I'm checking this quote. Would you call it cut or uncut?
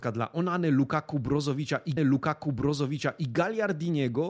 cut